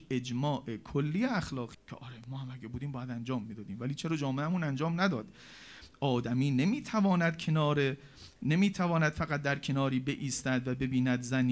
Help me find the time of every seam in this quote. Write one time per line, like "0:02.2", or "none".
0:01.7